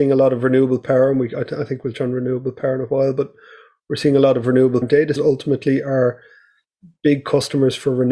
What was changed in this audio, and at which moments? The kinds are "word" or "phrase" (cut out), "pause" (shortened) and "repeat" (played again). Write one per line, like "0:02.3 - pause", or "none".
0:01.9 - word
0:04.8 - word
0:05.2 - word